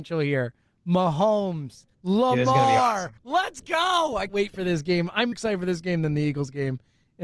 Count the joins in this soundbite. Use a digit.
4